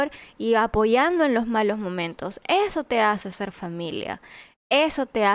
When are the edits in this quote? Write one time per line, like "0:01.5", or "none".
none